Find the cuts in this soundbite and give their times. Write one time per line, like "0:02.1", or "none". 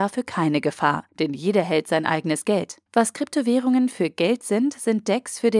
0:01.1
0:02.9